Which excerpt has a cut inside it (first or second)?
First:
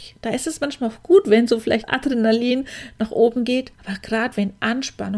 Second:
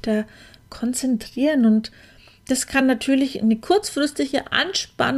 first